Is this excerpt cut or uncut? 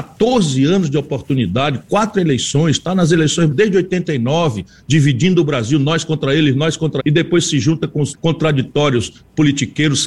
cut